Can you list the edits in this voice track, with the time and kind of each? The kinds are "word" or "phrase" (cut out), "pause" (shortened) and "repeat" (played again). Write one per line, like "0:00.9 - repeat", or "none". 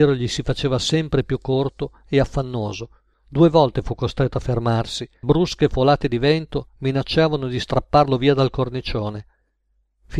0:03.1 - pause
0:05.2 - word

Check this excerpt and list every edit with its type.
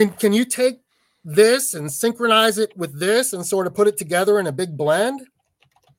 none

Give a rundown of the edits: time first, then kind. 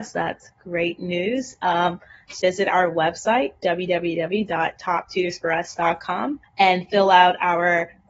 0:02.4 - phrase
0:06.4 - pause

